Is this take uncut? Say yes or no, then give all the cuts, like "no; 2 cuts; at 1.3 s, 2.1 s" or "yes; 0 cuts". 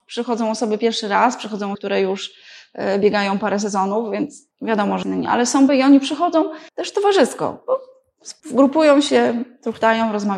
no; 6 cuts; at 1.7 s, 4.5 s, 5.0 s, 5.7 s, 6.7 s, 8.4 s